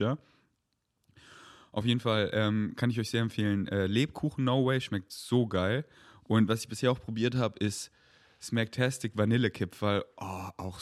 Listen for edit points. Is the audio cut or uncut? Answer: uncut